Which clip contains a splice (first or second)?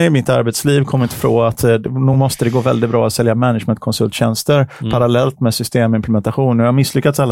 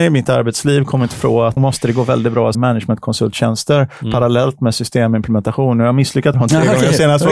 second